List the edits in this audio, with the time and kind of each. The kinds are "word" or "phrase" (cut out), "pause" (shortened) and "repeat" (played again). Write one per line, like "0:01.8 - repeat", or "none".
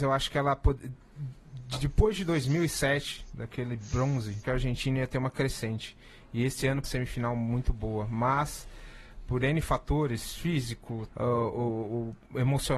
0:04.4 - phrase
0:06.8 - phrase
0:11.1 - word